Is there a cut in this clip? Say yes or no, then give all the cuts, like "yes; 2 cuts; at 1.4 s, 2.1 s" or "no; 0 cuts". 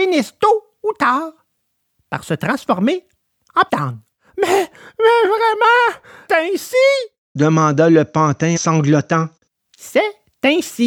yes; 3 cuts; at 3.7 s, 6.3 s, 8.6 s